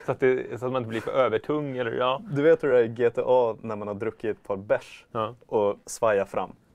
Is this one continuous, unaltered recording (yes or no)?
yes